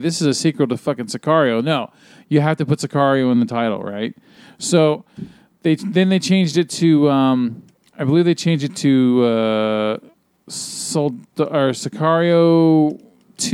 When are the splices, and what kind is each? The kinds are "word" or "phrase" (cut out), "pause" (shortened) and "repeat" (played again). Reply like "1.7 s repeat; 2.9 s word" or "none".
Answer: none